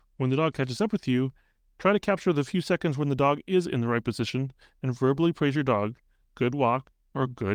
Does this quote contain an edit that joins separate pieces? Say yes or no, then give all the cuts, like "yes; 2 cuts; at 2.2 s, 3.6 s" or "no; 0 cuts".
no; 0 cuts